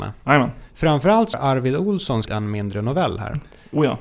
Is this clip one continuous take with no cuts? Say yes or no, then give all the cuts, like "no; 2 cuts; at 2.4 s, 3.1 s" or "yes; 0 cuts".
no; 2 cuts; at 1.3 s, 2.3 s